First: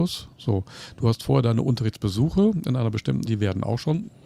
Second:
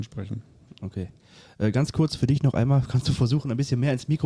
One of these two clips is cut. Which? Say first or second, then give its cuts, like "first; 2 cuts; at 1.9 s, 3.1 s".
first; 1 cut; at 3.3 s